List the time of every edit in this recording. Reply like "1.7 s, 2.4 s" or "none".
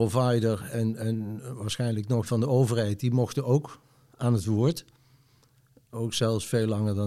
2.3 s